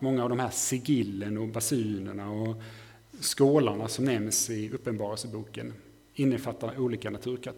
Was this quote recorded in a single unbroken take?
yes; 0 cuts

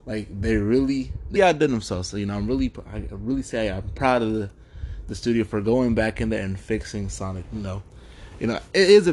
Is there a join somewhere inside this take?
yes; 1 cut; at 1.4 s

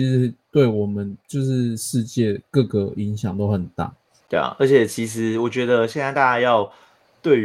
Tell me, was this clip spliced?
yes; 2 cuts; at 1.2 s, 4.2 s

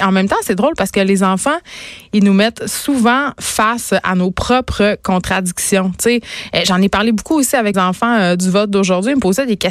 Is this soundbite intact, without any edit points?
no; 1 cut; at 7.7 s

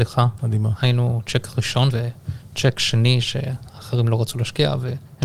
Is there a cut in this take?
yes; 1 cut; at 1.9 s

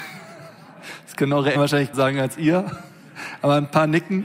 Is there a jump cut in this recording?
yes; 2 cuts; at 1.5 s, 1.9 s

